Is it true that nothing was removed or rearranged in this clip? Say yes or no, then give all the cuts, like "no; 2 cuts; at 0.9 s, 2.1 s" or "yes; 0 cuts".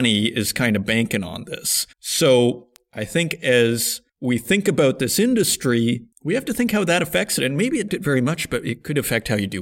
no; 4 cuts; at 1.9 s, 4.1 s, 6.1 s, 7.9 s